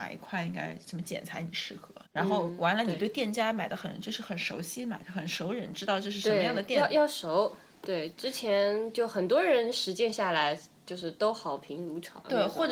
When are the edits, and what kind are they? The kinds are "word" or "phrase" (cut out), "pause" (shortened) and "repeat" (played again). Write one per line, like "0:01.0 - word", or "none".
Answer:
0:02.1 - pause